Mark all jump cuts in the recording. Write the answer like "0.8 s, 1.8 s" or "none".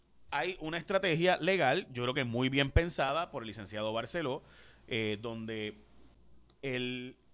none